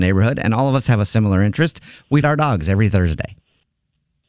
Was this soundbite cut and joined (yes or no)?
yes